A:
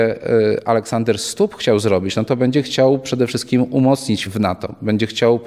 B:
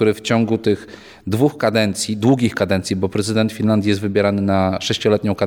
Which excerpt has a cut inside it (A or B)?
A